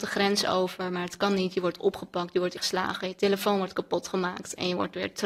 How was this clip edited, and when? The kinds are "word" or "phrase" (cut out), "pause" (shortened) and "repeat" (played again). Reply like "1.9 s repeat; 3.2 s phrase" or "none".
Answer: 2.6 s word